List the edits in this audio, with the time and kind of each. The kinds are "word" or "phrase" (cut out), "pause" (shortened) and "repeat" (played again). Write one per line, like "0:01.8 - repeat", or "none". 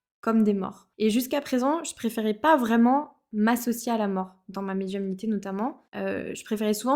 0:00.9 - pause
0:05.9 - pause